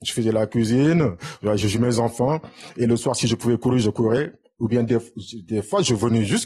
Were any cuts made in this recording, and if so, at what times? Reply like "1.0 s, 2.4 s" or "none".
1.7 s